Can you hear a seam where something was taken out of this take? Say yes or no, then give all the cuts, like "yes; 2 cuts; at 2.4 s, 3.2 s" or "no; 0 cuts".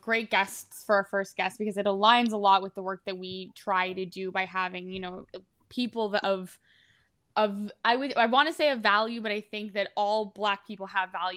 no; 0 cuts